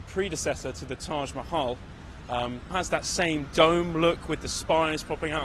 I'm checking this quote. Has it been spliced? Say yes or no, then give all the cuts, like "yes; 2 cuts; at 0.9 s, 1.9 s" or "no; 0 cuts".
yes; 1 cut; at 2.7 s